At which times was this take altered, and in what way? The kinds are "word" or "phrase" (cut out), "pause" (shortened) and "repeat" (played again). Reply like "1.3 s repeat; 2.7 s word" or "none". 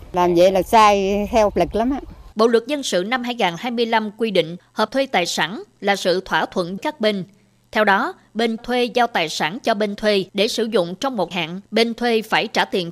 1.5 s word; 2.3 s pause; 4.9 s word; 6.8 s word; 8.6 s word; 10.3 s pause; 11.3 s word; 11.6 s pause